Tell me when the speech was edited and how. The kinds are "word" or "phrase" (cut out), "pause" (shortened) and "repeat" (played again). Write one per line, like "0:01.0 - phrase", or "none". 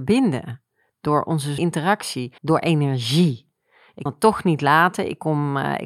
0:01.6 - word
0:02.4 - pause
0:04.1 - word